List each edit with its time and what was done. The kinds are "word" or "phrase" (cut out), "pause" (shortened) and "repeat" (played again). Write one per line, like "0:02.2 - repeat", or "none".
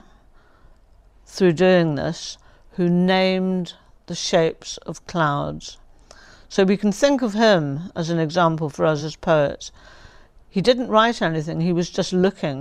none